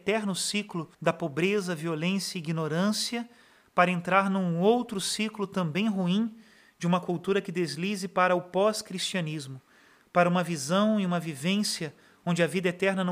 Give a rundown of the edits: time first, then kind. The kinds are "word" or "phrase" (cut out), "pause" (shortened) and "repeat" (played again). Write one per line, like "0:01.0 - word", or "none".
0:00.9 - pause